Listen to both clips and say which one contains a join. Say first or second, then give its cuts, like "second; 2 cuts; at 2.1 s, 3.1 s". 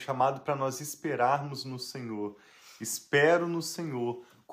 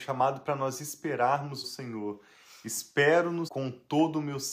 second; 2 cuts; at 1.6 s, 3.5 s